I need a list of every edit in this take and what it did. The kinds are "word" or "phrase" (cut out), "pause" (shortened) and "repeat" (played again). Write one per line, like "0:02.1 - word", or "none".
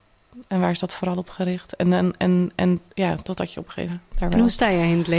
0:02.9 - pause
0:03.9 - phrase